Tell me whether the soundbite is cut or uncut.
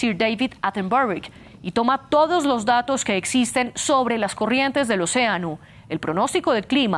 uncut